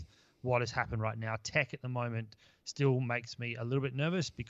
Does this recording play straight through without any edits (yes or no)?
yes